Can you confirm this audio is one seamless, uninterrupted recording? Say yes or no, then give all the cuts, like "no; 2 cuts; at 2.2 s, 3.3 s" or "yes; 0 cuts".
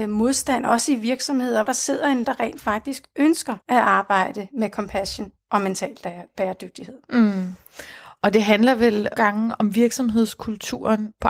no; 4 cuts; at 1.7 s, 2.2 s, 3.6 s, 9.2 s